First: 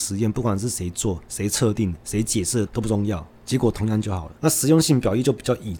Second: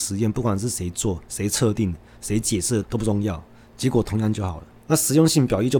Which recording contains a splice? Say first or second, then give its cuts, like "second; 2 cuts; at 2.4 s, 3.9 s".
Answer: first; 3 cuts; at 2.0 s, 3.4 s, 4.4 s